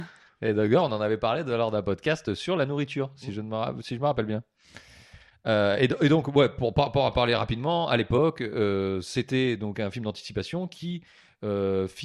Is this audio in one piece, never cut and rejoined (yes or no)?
yes